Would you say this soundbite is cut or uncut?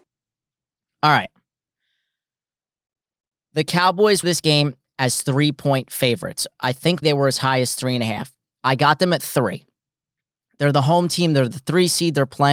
cut